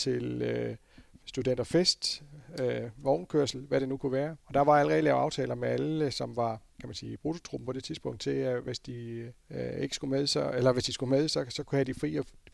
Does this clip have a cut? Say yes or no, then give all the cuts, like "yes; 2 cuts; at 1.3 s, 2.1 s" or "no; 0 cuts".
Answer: yes; 3 cuts; at 4.4 s, 6.7 s, 9.4 s